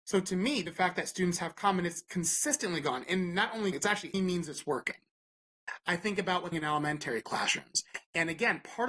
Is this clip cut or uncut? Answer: cut